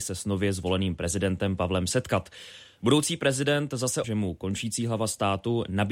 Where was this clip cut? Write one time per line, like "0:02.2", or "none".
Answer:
0:04.0

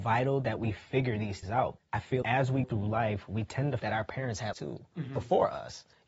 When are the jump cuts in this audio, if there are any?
0:01.4
0:01.8
0:02.2
0:02.6
0:03.8
0:04.5

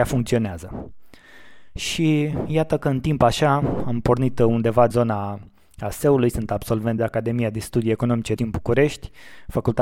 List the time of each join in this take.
0:04.9
0:07.0
0:08.4

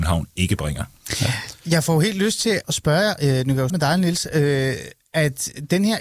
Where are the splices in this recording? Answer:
0:02.6
0:03.7

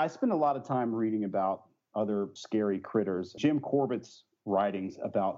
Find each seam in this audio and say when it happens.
0:02.4
0:03.4

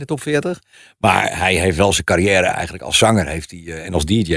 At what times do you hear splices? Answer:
none

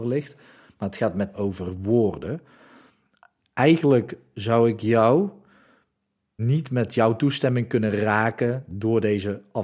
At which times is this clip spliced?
0:01.3
0:06.4

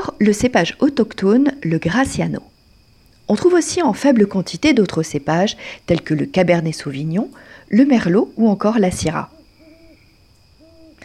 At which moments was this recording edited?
none

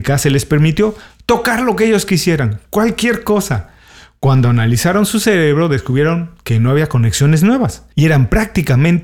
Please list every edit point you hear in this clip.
none

